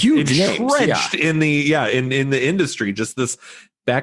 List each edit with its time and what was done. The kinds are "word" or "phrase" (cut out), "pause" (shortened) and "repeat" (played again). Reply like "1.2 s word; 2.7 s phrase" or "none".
none